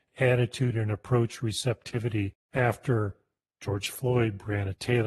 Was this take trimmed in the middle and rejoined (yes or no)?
no